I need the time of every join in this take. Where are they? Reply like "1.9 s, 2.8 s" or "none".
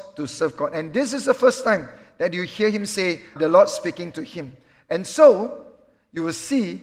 3.4 s